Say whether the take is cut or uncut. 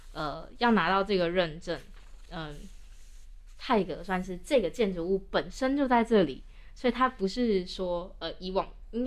uncut